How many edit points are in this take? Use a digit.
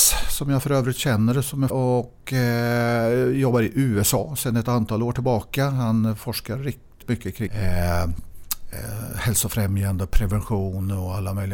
3